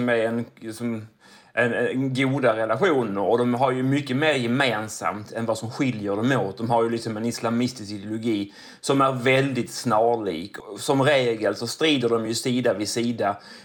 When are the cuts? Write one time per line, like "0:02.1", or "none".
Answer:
none